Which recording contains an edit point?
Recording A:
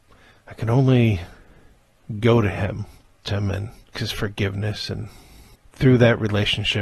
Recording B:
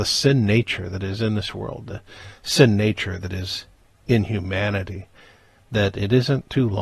A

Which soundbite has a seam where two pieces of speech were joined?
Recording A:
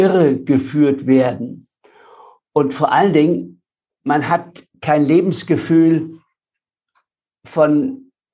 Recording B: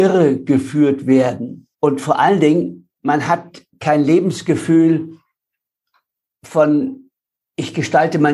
B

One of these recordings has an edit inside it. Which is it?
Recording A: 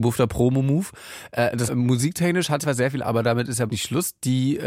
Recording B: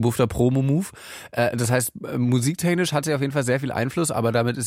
A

